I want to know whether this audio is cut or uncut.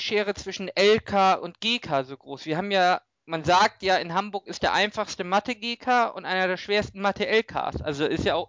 uncut